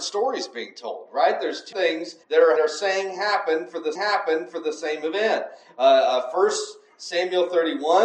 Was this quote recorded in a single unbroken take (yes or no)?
no